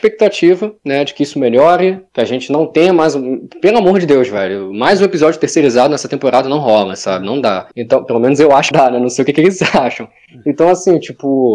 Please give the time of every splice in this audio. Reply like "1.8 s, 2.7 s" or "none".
7.7 s, 8.7 s